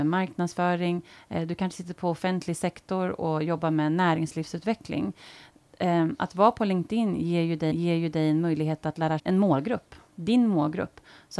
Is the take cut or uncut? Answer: cut